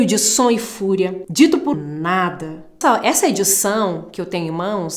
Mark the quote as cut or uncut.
cut